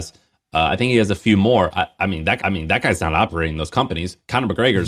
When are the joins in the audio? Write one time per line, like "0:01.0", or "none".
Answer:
0:02.4